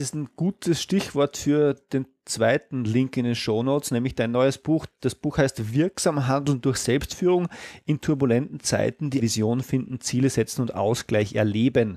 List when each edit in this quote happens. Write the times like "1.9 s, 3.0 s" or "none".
9.2 s